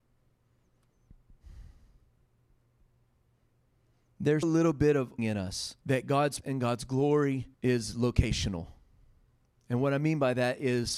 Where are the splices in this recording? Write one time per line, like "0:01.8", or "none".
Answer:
0:04.4
0:05.2
0:05.8
0:06.4
0:07.5